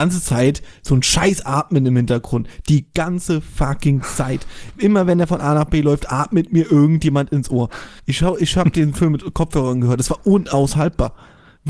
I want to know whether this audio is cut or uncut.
cut